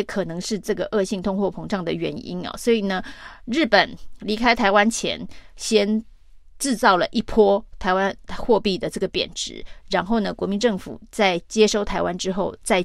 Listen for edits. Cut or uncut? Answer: uncut